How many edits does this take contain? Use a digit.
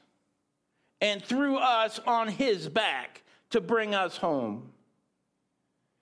0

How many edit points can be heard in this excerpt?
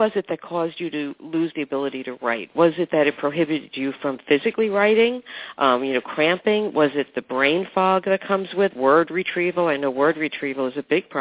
1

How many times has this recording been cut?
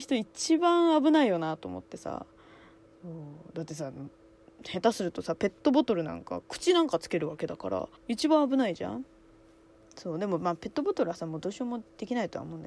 1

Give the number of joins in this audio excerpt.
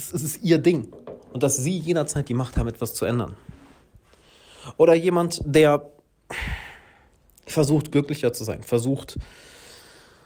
0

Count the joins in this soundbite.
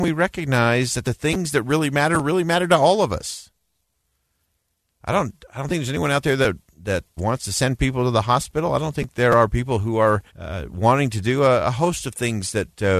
2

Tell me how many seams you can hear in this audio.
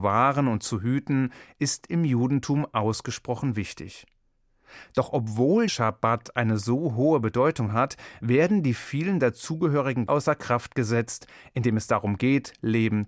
2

